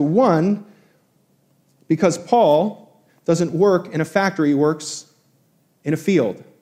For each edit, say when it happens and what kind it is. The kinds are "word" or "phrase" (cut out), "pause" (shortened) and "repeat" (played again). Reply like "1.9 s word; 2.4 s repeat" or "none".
none